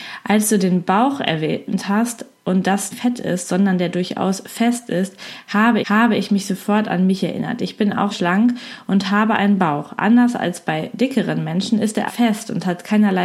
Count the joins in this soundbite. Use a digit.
5